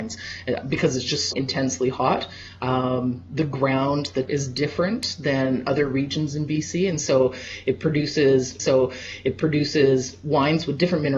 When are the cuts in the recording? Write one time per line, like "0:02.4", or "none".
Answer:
0:01.3
0:04.3
0:08.6